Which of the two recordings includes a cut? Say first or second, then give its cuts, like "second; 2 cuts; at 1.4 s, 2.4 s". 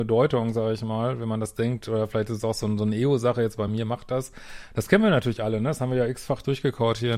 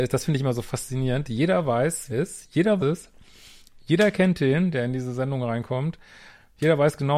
second; 2 cuts; at 2.1 s, 2.8 s